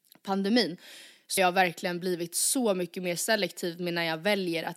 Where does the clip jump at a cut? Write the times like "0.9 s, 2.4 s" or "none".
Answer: 1.4 s